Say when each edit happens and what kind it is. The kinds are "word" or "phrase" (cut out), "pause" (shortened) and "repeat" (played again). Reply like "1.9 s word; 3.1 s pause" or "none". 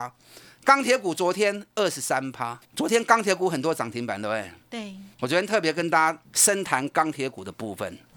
2.6 s pause; 5.1 s pause; 6.2 s pause